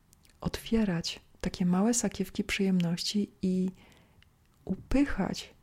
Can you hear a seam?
no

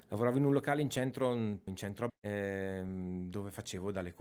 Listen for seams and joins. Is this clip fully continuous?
no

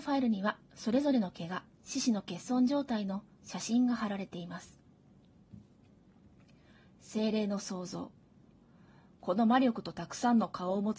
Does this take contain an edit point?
no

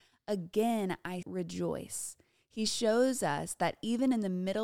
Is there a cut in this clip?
yes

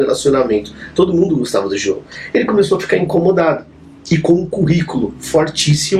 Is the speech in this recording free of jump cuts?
yes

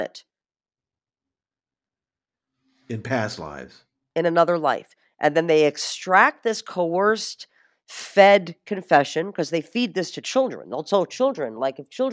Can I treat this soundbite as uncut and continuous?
yes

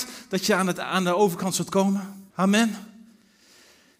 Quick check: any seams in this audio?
yes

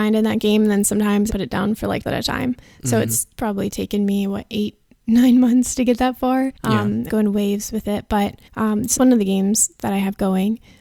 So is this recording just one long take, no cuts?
no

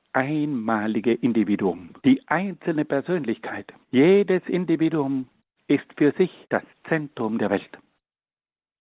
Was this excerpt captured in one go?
no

